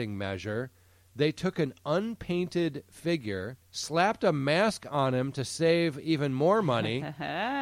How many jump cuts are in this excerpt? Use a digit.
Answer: 1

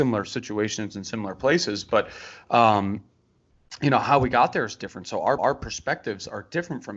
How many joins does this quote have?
1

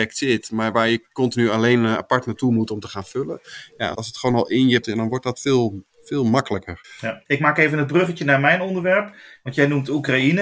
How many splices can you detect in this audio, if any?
2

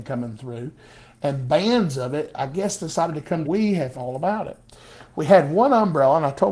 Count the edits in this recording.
2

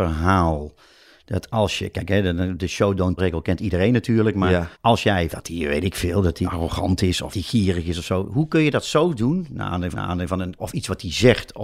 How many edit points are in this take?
7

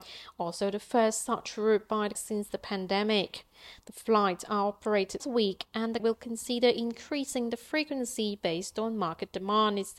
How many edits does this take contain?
3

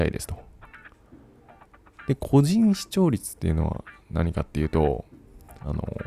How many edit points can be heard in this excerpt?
0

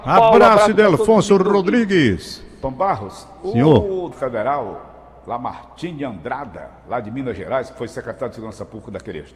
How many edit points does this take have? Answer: 1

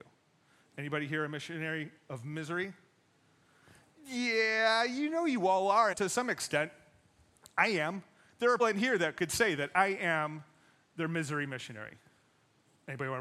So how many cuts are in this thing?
2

